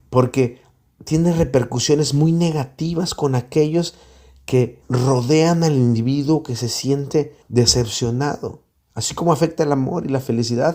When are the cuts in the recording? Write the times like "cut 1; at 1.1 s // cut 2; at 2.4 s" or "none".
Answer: cut 1; at 4.8 s // cut 2; at 7.4 s